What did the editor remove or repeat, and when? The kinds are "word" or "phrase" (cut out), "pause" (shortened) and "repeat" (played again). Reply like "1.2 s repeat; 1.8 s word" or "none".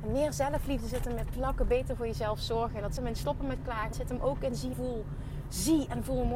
1.3 s word; 3.0 s word; 3.9 s word; 4.7 s word